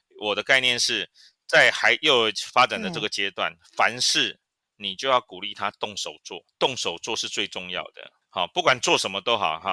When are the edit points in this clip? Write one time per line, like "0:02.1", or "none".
none